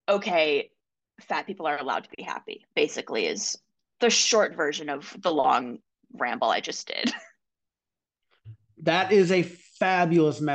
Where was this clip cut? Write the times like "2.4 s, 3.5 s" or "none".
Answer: none

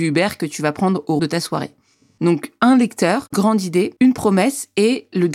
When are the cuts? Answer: 1.2 s, 3.3 s, 4.0 s

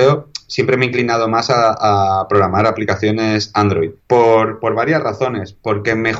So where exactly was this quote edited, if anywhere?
4.0 s

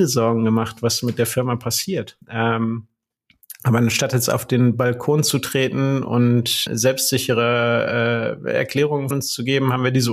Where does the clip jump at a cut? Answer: 2.2 s, 6.7 s, 9.1 s

